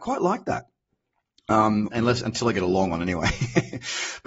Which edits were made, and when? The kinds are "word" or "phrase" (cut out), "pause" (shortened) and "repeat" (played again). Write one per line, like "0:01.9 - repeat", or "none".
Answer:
0:01.9 - word